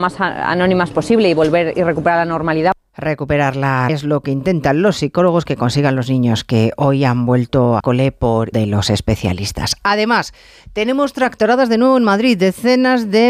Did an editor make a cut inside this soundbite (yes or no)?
yes